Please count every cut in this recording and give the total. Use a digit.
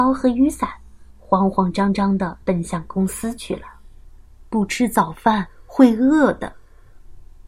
2